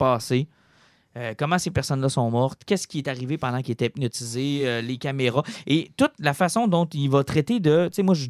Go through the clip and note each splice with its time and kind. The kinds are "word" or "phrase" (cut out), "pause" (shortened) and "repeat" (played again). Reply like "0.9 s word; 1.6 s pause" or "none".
none